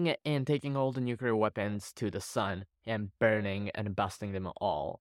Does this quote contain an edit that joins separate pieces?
no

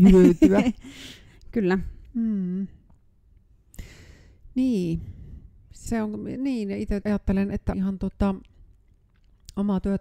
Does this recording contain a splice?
yes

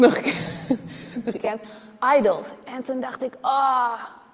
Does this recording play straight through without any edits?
no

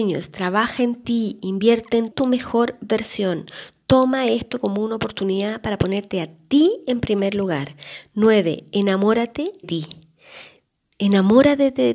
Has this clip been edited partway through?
yes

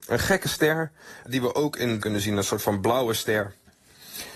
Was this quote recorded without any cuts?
no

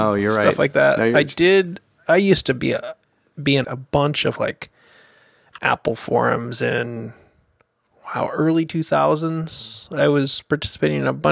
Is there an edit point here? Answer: yes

